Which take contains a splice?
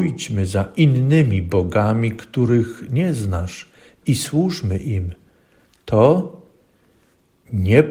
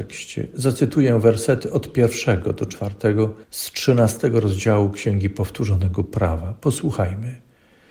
second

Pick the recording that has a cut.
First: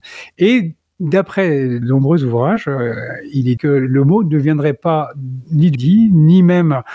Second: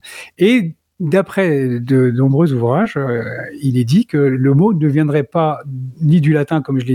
first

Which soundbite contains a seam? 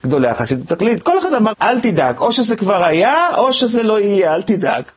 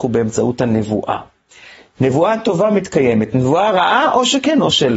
first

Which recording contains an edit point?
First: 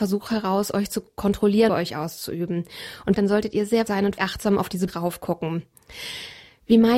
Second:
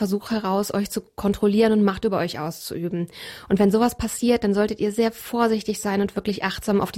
first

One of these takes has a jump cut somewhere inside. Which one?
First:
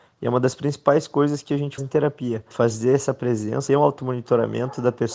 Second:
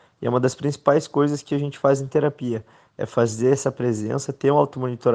first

